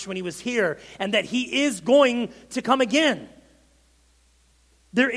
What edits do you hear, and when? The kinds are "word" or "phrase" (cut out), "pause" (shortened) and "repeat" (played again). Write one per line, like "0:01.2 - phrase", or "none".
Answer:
none